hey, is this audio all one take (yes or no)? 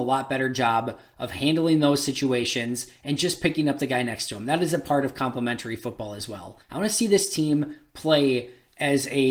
no